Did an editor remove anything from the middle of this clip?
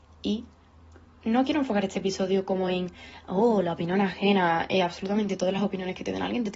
no; 0 cuts

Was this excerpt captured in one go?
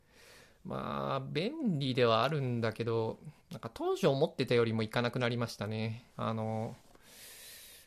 no; 2 cuts; at 3.4 s, 6.1 s

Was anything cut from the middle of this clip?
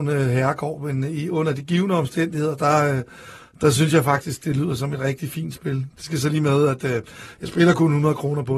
no; 0 cuts

